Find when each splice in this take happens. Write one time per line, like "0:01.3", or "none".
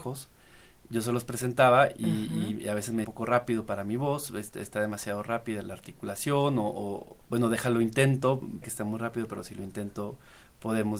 0:03.0
0:05.6
0:07.2
0:08.6